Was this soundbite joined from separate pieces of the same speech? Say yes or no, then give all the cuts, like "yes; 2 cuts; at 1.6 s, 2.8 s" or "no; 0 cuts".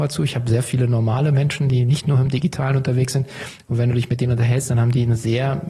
no; 0 cuts